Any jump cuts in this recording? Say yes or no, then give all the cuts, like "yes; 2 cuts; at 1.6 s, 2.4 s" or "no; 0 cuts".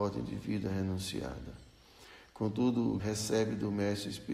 yes; 1 cut; at 3.0 s